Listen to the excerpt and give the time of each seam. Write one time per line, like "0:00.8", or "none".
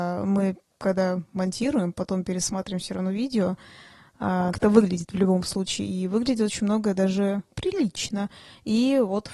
0:04.5
0:07.5